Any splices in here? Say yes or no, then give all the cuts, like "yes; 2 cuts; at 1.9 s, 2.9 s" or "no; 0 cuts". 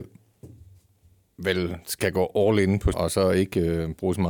yes; 1 cut; at 2.9 s